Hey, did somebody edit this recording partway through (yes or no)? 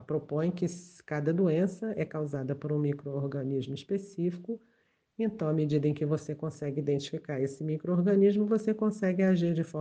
no